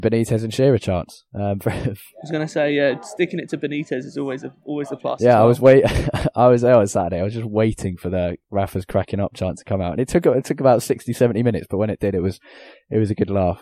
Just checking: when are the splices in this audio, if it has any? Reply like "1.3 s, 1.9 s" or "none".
none